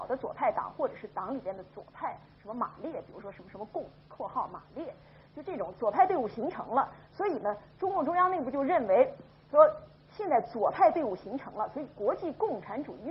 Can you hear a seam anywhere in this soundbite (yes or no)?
no